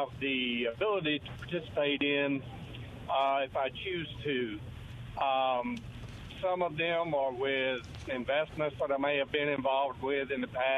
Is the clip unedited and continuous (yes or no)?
yes